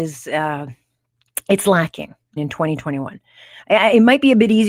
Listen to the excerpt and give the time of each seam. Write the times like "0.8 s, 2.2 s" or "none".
2.4 s